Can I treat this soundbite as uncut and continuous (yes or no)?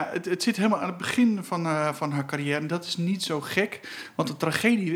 yes